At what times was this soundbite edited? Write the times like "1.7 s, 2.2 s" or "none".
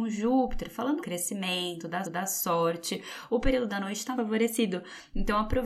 1.0 s, 2.0 s, 3.7 s, 4.1 s